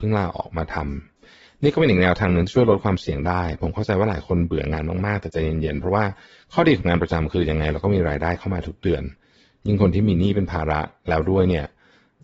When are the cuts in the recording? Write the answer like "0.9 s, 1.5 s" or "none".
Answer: none